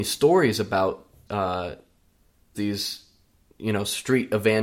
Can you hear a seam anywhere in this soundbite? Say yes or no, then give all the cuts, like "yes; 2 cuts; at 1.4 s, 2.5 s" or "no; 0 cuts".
yes; 2 cuts; at 1.3 s, 2.5 s